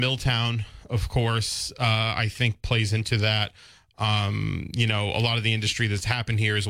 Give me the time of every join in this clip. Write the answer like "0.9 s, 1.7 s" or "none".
none